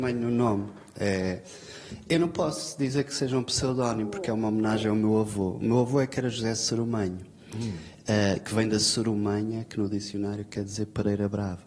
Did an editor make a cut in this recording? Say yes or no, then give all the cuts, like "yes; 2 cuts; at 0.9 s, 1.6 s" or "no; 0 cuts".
no; 0 cuts